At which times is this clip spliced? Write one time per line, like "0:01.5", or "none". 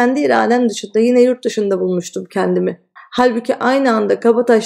0:03.0